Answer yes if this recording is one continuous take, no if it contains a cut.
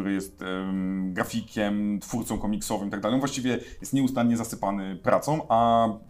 yes